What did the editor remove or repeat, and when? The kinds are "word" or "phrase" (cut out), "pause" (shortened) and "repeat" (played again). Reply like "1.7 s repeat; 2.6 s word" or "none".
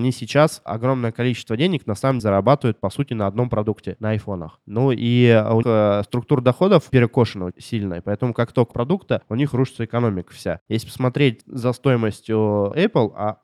2.2 s word; 5.6 s word; 6.9 s word; 8.7 s phrase